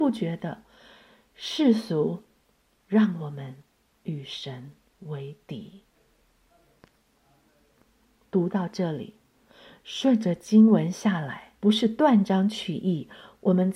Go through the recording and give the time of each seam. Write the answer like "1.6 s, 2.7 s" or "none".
11.6 s